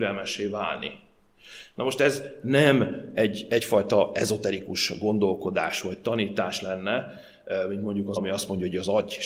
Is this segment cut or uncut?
cut